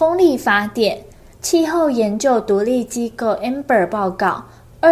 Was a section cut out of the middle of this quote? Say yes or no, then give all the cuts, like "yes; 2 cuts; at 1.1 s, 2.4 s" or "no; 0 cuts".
no; 0 cuts